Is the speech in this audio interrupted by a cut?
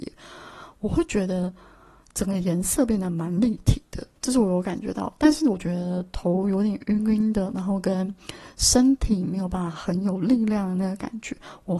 yes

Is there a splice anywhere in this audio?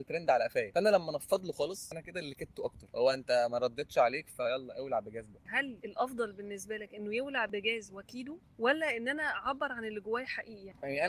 no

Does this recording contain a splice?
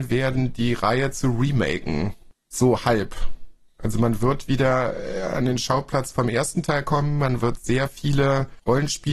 no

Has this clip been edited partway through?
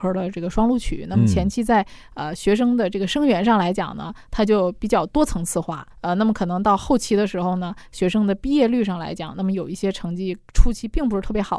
yes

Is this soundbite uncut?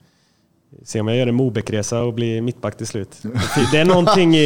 yes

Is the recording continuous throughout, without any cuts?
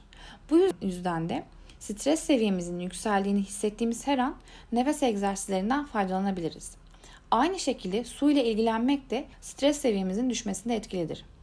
no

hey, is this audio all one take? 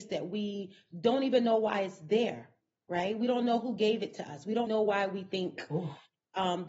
no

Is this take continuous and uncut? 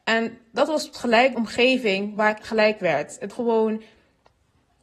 no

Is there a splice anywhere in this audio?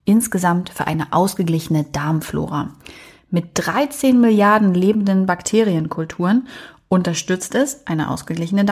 no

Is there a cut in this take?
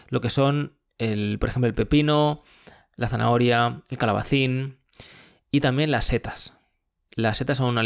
no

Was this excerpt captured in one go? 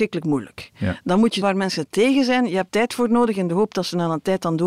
no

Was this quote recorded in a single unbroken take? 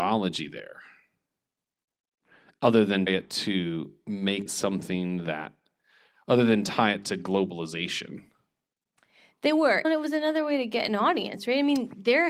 no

